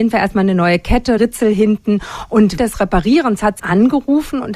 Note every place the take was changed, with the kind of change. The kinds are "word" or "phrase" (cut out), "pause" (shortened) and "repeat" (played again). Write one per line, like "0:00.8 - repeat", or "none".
0:01.2 - word
0:02.6 - word
0:03.6 - phrase